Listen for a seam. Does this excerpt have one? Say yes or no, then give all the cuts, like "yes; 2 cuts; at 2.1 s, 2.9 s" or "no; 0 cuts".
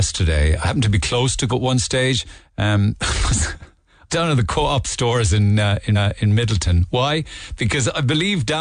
yes; 4 cuts; at 1.0 s, 1.5 s, 4.1 s, 5.9 s